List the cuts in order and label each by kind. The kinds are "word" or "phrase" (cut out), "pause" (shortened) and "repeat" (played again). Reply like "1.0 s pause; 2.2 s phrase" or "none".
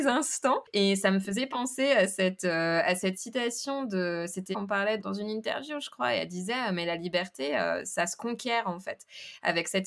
4.5 s phrase; 5.0 s word